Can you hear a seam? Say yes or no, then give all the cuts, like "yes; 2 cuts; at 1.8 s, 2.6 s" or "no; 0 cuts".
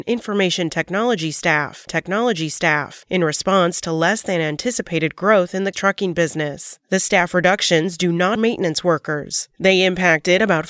yes; 3 cuts; at 1.9 s, 5.7 s, 8.4 s